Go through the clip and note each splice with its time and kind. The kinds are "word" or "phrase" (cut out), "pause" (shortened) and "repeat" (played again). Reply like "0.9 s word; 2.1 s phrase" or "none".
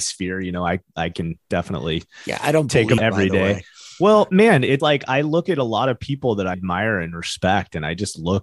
3.0 s phrase; 4.8 s word; 6.5 s word